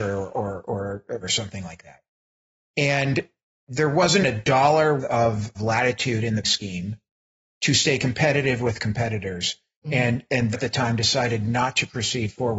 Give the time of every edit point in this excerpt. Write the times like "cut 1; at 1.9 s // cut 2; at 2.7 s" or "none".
cut 1; at 1.2 s // cut 2; at 4.2 s // cut 3; at 5.0 s // cut 4; at 5.5 s // cut 5; at 6.4 s // cut 6; at 10.5 s